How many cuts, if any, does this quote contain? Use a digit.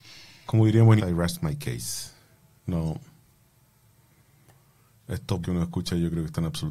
2